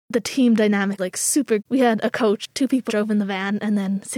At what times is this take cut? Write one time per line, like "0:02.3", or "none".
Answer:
0:01.0
0:01.6
0:02.9

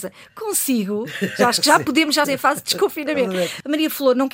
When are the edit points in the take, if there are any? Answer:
0:02.2

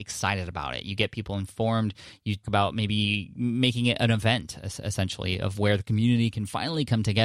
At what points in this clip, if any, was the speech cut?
0:02.4

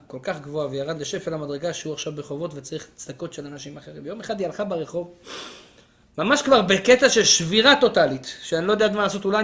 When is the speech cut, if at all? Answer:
none

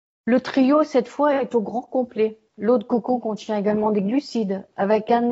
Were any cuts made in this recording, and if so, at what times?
0:02.5

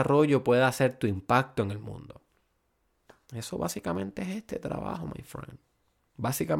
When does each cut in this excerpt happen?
none

